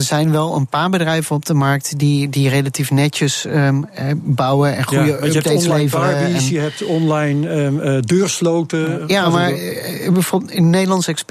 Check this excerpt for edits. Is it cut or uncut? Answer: uncut